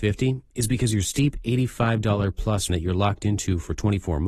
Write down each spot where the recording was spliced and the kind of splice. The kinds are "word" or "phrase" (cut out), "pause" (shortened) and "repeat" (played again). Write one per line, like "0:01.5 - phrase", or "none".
0:02.7 - word